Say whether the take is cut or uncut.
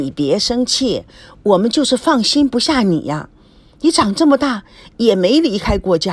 uncut